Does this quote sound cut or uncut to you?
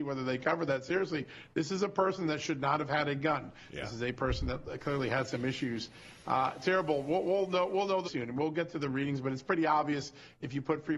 cut